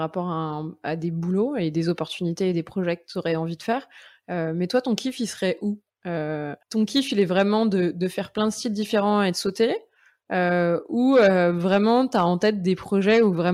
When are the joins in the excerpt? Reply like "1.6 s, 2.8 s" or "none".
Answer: 6.6 s

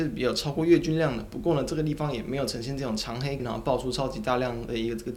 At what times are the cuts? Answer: 3.4 s

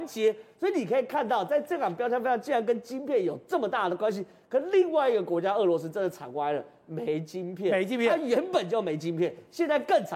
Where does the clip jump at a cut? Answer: none

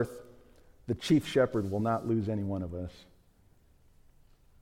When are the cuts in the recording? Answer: none

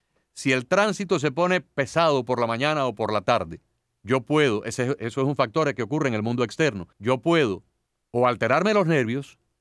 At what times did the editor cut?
3.8 s, 6.9 s, 8.0 s

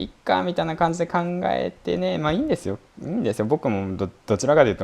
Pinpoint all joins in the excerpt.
none

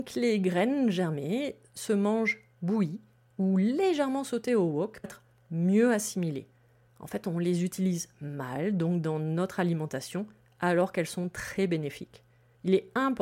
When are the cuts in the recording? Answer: 5.0 s

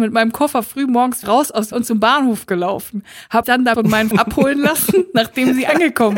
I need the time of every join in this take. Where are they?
1.2 s, 1.7 s, 3.4 s, 3.7 s, 4.1 s

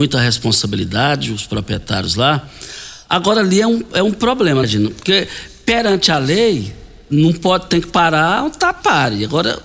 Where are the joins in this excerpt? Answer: 4.6 s

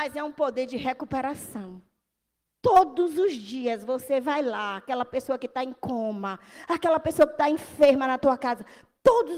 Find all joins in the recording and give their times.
none

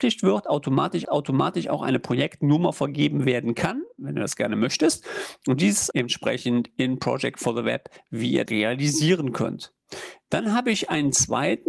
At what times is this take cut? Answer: 1.0 s, 5.9 s, 8.5 s

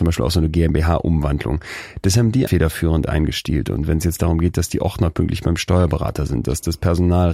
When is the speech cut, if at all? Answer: 2.5 s

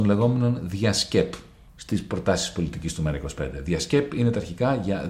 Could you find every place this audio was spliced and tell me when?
1.7 s

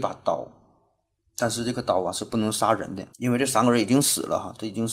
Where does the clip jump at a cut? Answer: 3.1 s

